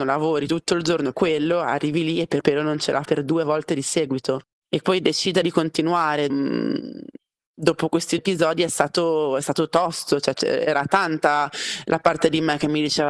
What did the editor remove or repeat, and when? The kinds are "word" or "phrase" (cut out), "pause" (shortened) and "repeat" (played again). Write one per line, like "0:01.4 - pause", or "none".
0:01.1 - word
0:02.4 - word
0:03.0 - word
0:04.8 - word
0:05.4 - word
0:06.3 - word
0:08.2 - word
0:10.3 - word